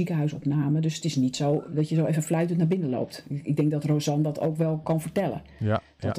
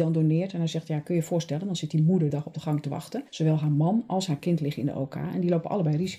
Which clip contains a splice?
second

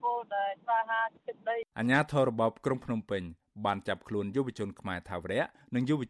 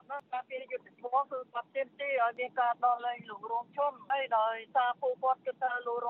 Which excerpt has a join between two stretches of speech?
first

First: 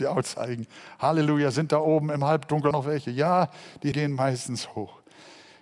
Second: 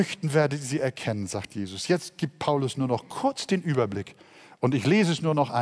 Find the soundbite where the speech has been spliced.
first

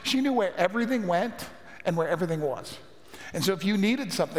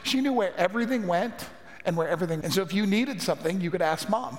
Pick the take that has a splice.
second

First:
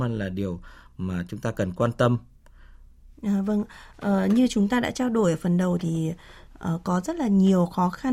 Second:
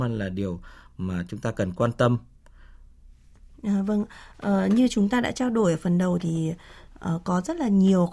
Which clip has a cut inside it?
first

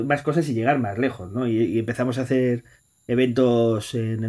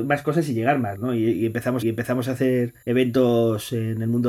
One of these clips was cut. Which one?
second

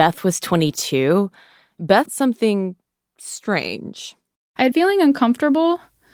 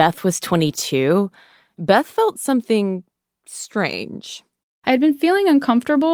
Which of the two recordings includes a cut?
first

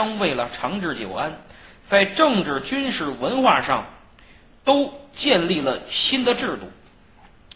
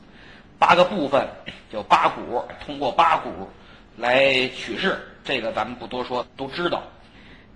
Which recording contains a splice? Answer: second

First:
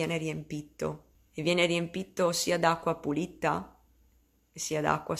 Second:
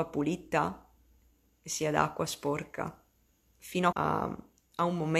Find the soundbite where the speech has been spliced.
second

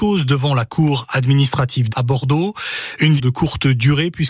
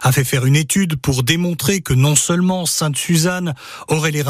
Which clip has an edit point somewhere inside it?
first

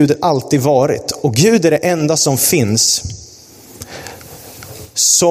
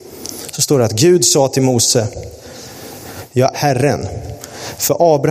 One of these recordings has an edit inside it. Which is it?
second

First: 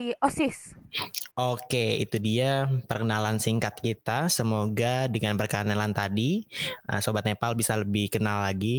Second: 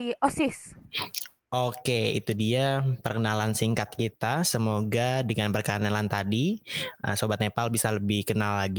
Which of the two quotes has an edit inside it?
first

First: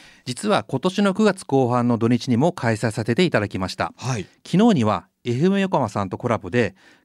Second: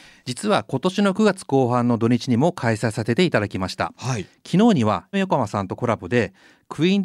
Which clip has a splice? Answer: second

